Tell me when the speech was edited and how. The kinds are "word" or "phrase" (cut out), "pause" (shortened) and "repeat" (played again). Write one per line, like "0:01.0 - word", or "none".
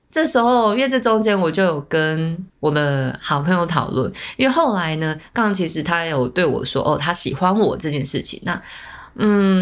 0:02.5 - pause

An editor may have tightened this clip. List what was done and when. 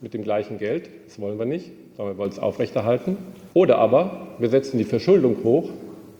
0:03.5 - pause

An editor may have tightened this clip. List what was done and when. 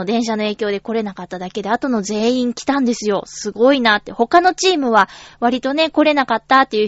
none

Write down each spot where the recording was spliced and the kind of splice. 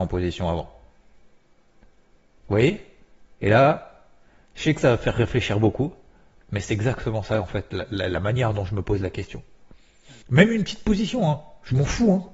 0:10.2 - pause

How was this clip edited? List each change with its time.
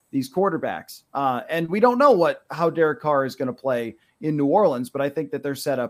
none

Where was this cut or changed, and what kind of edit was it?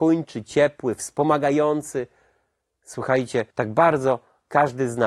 0:03.5 - pause

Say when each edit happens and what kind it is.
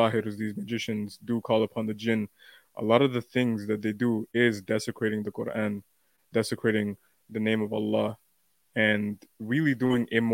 none

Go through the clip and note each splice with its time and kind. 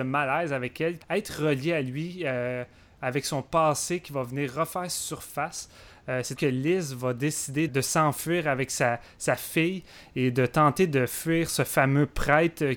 0:01.0 - word
0:06.4 - word
0:07.7 - word

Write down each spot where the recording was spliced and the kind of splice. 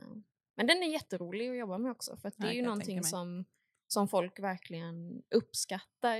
none

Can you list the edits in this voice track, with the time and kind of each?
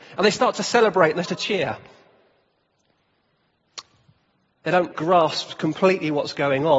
0:01.3 - word
0:04.9 - word

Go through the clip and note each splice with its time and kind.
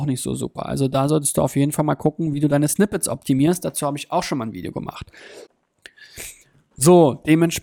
none

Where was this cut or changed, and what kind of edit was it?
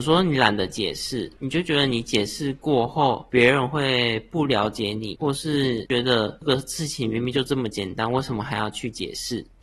0:05.2 - word

